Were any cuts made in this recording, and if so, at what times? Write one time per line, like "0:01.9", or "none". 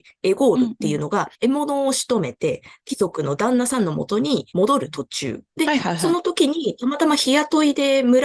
0:02.8
0:04.5
0:05.5